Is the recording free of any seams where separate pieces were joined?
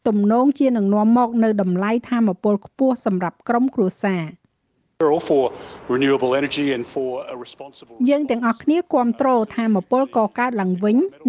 yes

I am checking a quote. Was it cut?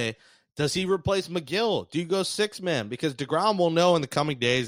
no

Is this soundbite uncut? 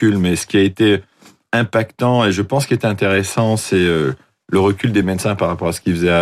yes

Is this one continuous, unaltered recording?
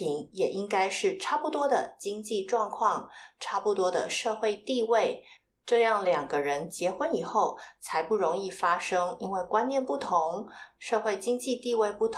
yes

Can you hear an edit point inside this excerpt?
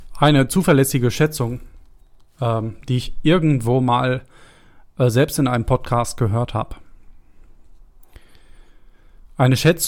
no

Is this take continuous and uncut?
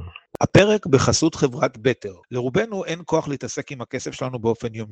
no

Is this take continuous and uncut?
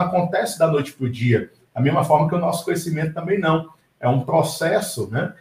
yes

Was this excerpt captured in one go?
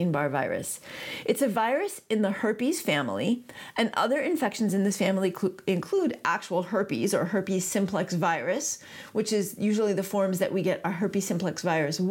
yes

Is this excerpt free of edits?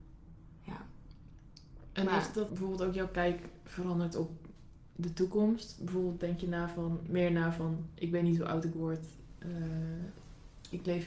no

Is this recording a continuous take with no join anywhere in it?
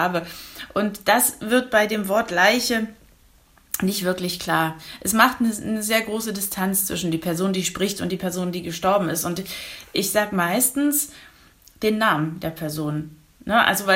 yes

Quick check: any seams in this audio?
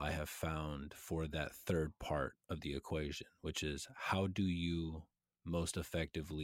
no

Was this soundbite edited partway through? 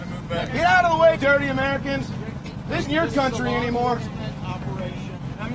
yes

